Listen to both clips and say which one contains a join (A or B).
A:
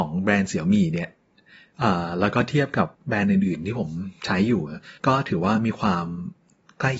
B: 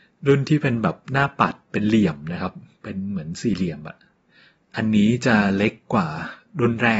A